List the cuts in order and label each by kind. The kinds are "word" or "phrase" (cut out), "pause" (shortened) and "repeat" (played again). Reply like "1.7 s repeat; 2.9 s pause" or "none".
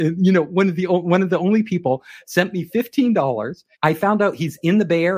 3.7 s pause